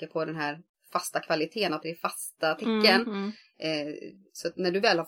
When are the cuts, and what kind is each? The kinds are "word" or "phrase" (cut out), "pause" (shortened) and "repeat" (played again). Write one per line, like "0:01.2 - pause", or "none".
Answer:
0:01.8 - phrase